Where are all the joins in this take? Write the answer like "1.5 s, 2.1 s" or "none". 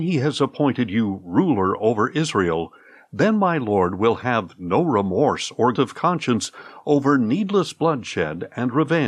5.7 s